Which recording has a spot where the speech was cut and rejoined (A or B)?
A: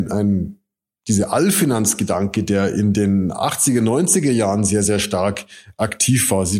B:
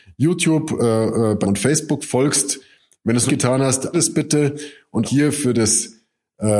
B